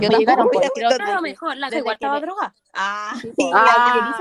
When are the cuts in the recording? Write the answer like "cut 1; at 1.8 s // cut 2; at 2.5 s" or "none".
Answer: cut 1; at 1.0 s // cut 2; at 1.7 s

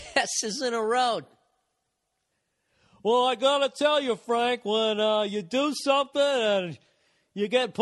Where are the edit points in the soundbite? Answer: none

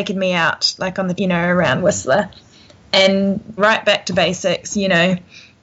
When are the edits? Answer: cut 1; at 1.2 s // cut 2; at 3.6 s

